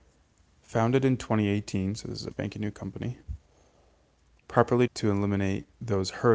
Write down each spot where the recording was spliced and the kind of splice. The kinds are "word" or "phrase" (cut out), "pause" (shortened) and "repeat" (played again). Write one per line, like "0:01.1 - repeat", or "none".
0:02.3 - word
0:04.9 - word